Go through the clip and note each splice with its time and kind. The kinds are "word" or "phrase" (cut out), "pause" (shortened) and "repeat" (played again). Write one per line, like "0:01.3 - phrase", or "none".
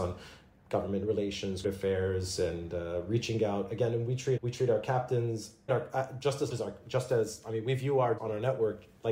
0:01.6 - word
0:04.4 - word
0:05.7 - word
0:06.5 - word
0:08.2 - word